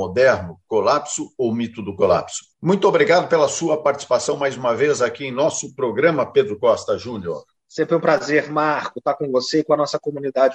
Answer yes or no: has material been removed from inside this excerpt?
no